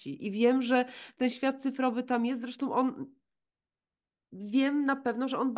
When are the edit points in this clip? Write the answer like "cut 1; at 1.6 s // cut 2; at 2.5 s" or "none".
none